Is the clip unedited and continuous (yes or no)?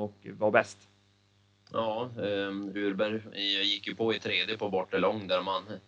yes